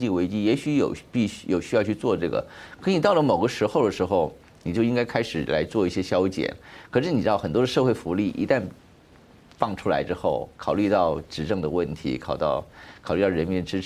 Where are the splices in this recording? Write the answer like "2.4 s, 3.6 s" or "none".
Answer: 10.5 s